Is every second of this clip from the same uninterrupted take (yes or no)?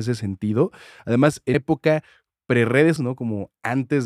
no